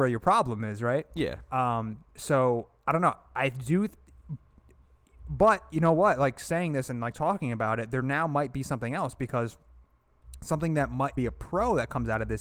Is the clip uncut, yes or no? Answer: no